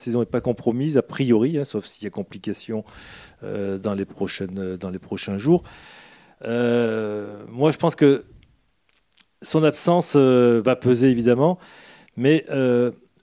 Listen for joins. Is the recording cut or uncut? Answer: uncut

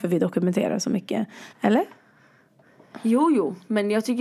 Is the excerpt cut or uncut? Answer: cut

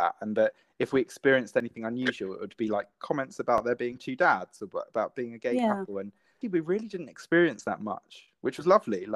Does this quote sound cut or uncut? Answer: cut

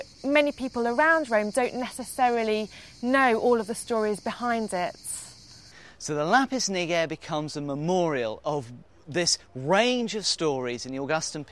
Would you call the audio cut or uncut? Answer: uncut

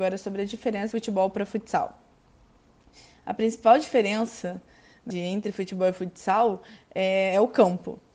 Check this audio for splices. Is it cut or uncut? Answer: cut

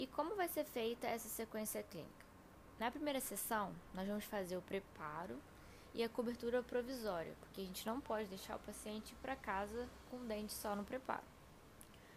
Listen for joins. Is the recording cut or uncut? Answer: uncut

